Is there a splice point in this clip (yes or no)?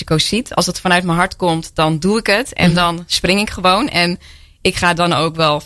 no